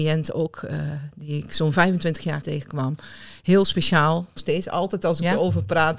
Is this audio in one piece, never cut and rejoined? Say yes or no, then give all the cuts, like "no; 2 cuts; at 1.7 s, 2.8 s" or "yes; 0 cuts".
no; 2 cuts; at 2.4 s, 4.4 s